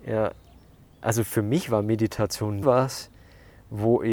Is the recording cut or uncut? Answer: cut